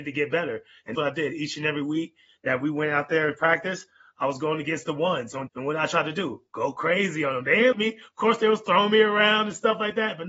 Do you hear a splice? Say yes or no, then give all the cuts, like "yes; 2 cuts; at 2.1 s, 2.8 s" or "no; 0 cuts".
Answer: yes; 3 cuts; at 0.9 s, 5.5 s, 7.7 s